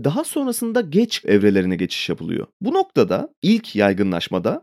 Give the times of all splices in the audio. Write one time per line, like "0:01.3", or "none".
0:01.2
0:02.5